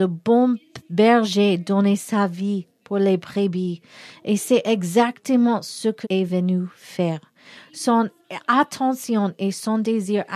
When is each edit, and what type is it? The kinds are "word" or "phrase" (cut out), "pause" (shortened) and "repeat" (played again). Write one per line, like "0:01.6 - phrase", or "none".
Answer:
0:06.0 - word